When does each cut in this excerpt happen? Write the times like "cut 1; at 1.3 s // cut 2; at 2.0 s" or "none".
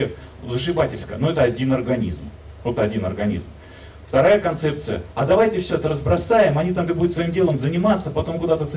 cut 1; at 2.8 s // cut 2; at 5.7 s // cut 3; at 6.9 s